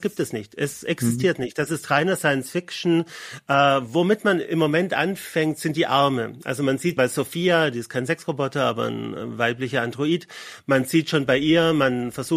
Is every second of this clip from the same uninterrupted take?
no; 1 cut; at 7.0 s

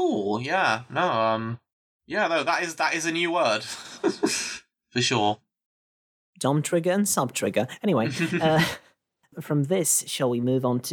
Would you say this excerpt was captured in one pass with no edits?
yes; 0 cuts

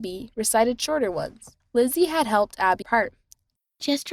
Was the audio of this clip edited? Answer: yes; 2 cuts; at 1.6 s, 2.8 s

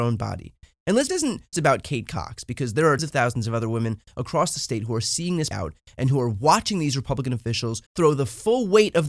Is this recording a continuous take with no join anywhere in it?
no; 5 cuts; at 1.1 s, 1.5 s, 3.0 s, 5.5 s, 7.9 s

